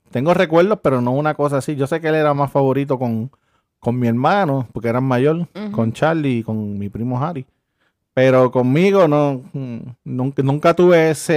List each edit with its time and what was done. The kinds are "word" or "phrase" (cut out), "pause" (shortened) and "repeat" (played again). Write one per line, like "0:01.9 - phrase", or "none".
none